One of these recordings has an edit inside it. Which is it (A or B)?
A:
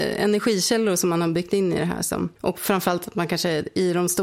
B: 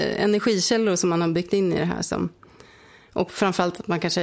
A